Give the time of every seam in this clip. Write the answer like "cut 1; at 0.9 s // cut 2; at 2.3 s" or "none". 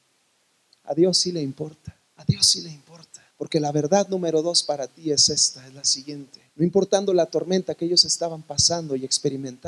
cut 1; at 2.0 s // cut 2; at 3.3 s // cut 3; at 6.5 s